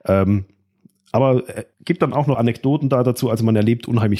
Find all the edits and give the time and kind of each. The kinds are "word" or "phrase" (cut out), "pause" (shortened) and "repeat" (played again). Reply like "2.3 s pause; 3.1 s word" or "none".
1.7 s pause; 2.3 s phrase